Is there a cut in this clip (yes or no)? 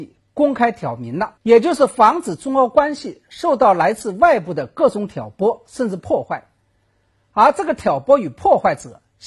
yes